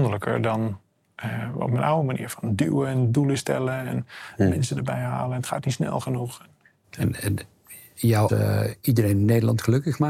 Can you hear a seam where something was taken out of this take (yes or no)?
yes